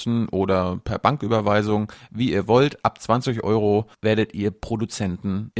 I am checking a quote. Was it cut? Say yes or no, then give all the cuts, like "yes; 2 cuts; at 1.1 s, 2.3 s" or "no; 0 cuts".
no; 0 cuts